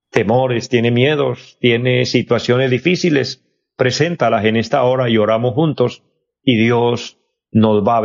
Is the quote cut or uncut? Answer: uncut